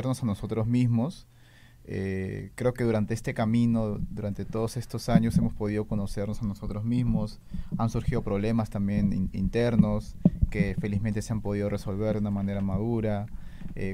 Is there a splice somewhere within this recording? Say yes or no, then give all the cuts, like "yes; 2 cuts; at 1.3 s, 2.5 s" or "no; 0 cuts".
no; 0 cuts